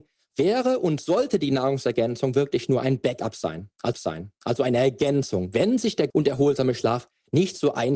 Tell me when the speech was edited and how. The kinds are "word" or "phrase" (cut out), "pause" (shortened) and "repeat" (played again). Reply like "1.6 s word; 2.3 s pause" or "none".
3.9 s repeat; 6.1 s word